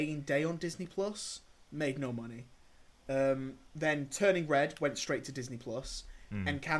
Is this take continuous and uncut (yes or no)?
yes